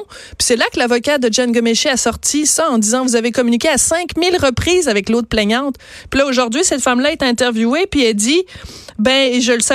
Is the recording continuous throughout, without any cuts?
yes; 0 cuts

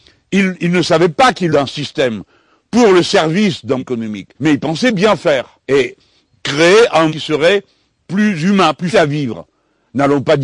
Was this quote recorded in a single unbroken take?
no; 6 cuts; at 1.5 s, 3.8 s, 4.3 s, 5.6 s, 7.1 s, 8.9 s

